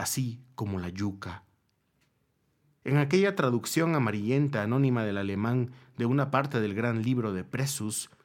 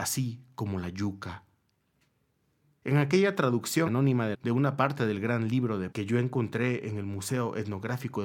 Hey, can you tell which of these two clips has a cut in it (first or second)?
second